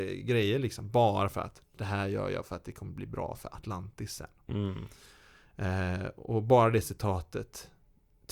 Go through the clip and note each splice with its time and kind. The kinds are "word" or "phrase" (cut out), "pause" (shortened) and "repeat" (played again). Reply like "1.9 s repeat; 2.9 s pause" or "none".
none